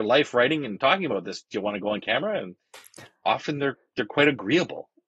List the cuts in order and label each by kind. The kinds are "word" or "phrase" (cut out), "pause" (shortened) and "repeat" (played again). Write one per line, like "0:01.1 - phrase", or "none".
none